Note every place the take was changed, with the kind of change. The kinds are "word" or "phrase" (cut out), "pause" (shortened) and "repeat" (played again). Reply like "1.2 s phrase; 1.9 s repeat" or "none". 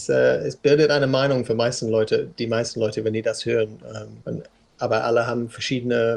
4.2 s pause